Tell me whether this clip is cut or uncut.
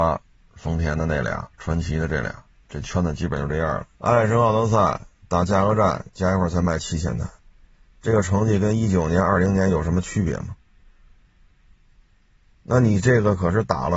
cut